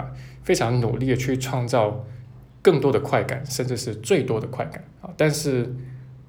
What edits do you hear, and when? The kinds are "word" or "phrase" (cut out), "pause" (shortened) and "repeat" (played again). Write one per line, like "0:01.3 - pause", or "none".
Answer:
0:05.0 - pause